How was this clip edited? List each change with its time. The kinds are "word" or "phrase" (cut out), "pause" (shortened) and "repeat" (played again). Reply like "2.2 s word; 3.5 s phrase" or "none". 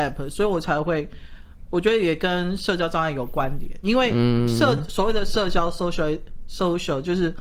none